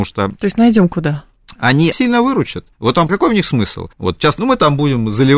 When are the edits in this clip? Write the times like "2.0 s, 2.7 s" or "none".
1.9 s, 2.7 s, 3.1 s, 3.9 s, 4.4 s